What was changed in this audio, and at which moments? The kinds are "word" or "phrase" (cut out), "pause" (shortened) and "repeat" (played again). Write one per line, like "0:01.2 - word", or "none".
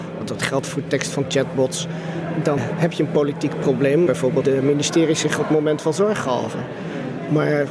0:02.6 - word
0:04.1 - phrase
0:04.4 - word

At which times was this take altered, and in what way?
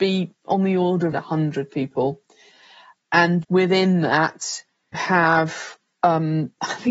0:01.1 - word
0:03.4 - word
0:04.9 - word

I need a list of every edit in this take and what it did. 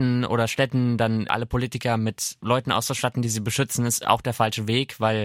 none

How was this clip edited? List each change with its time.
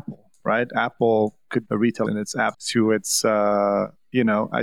0:01.6 - phrase
0:02.0 - word
0:02.5 - word

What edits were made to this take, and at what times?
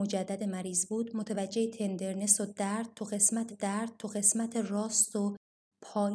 0:03.5 - repeat

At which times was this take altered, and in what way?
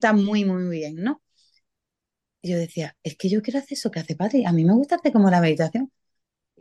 none

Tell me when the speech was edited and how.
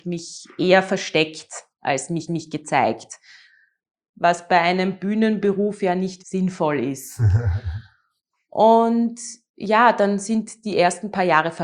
0:02.3 - repeat
0:06.2 - word

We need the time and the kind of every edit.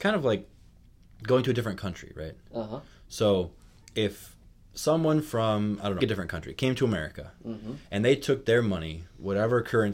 0:06.0 - phrase

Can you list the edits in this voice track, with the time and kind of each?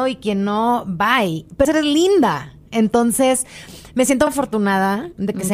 0:01.6 - word
0:04.3 - word

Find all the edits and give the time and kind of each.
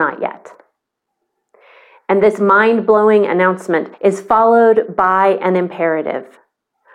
0:03.9 - pause

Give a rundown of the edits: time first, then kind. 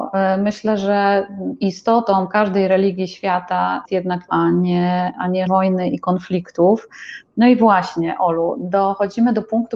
0:03.9 - word
0:04.3 - phrase
0:05.5 - word

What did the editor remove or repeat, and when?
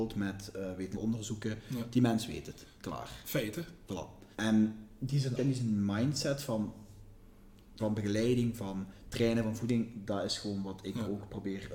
0:00.9 - word
0:04.3 - pause
0:05.4 - word
0:07.8 - word

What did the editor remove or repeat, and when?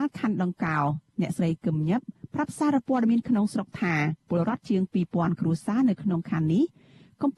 0:04.2 - pause

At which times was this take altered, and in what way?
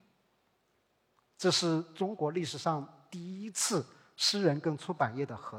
none

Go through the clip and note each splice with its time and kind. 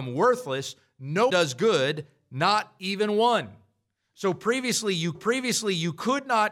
0:01.3 - word
0:05.1 - repeat

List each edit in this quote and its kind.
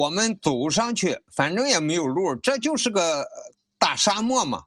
none

